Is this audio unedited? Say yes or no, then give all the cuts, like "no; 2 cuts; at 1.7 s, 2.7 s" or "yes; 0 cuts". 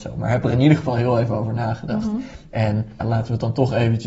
no; 1 cut; at 3.0 s